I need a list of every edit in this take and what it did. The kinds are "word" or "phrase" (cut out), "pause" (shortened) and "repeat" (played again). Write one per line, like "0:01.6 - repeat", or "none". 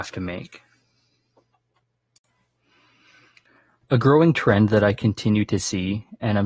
none